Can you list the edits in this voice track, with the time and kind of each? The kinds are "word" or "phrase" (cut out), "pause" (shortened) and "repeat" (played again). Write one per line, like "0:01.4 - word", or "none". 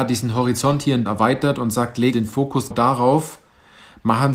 0:01.1 - word
0:02.1 - word
0:02.7 - word